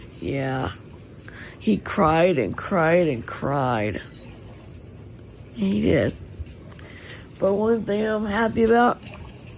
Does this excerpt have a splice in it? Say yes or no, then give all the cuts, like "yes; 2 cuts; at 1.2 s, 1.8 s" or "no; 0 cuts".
no; 0 cuts